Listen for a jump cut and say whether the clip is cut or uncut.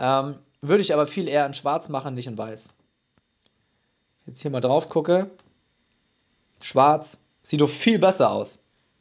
uncut